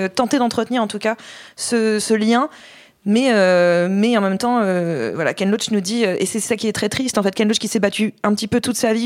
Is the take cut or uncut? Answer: cut